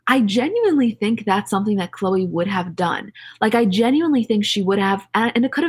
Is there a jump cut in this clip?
no; 0 cuts

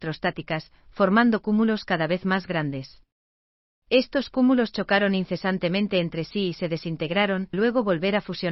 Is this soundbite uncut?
no; 1 cut; at 7.5 s

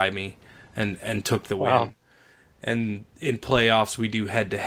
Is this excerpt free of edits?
yes; 0 cuts

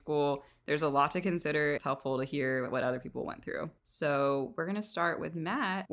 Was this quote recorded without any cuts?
no; 2 cuts; at 1.8 s, 3.8 s

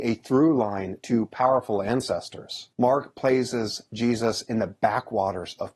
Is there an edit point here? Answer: yes; 1 cut; at 2.7 s

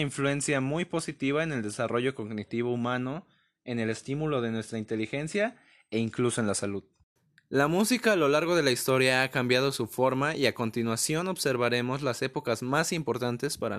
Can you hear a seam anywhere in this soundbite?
no; 0 cuts

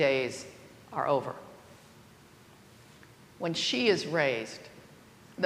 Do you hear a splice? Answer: no; 0 cuts

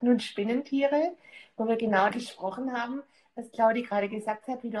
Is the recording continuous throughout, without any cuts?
no; 1 cut; at 2.1 s

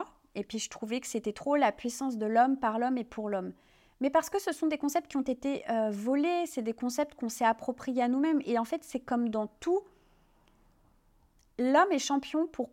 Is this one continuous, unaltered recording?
yes; 0 cuts

